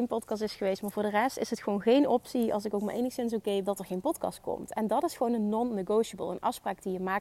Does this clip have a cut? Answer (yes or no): yes